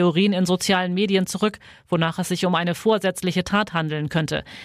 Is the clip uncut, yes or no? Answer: yes